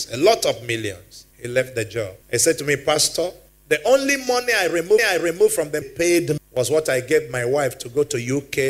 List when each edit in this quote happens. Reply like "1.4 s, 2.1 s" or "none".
1.3 s, 2.2 s, 3.5 s, 5.0 s, 5.8 s, 6.4 s